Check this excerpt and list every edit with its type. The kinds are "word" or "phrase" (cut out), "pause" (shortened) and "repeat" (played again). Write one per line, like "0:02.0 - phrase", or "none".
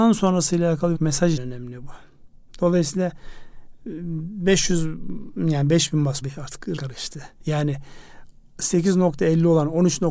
0:00.9 - word
0:01.4 - word
0:06.2 - word
0:06.8 - word